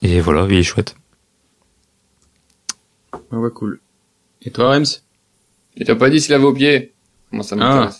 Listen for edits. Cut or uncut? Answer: uncut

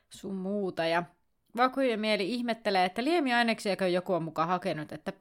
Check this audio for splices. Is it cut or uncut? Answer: uncut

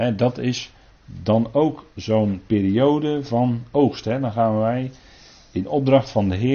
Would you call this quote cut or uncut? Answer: uncut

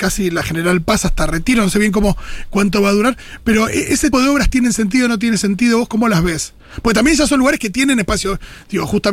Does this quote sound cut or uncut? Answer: cut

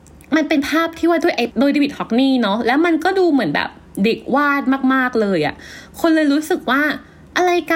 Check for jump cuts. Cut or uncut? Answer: cut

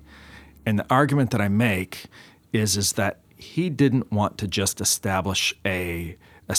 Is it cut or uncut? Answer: uncut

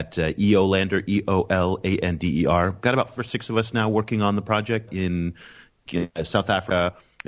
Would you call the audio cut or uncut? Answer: cut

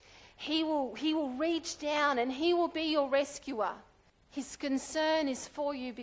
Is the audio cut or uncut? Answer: cut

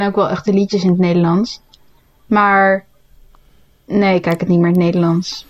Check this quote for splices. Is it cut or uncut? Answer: uncut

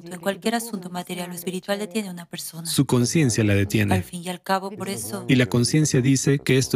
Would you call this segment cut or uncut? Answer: uncut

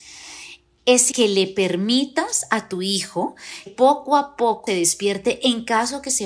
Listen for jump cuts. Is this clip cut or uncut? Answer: cut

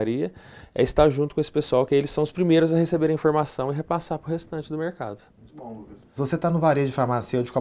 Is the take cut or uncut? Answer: cut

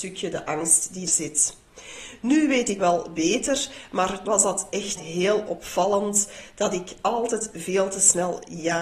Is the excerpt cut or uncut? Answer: cut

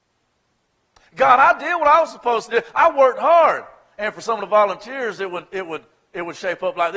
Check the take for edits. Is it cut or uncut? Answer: uncut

